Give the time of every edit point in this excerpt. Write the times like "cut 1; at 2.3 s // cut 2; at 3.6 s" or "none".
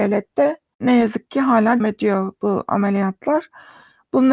cut 1; at 1.8 s